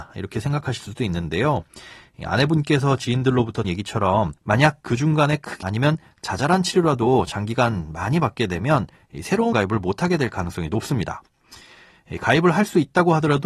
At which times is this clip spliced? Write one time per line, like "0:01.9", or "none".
0:03.6
0:04.4
0:05.6
0:09.5